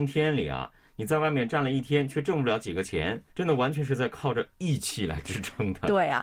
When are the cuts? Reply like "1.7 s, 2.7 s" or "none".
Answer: 3.3 s